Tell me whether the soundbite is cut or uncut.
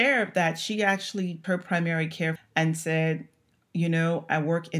cut